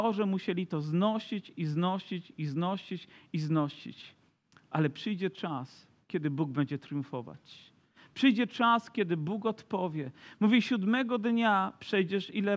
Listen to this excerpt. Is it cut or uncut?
uncut